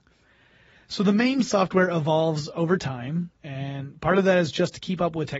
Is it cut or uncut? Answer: cut